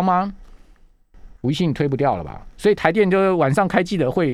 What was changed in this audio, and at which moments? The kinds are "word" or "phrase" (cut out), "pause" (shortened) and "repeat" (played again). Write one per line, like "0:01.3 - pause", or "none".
0:01.4 - pause